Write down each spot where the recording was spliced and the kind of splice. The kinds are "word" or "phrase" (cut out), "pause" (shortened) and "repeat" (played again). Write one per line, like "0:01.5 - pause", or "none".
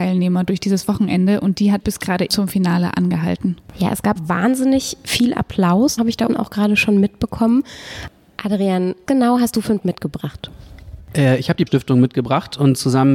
0:01.8 - word
0:02.3 - word
0:04.2 - word
0:06.0 - word
0:06.3 - word
0:09.1 - word
0:09.8 - word
0:11.7 - word